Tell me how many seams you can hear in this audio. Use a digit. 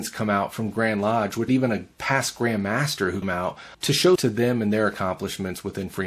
4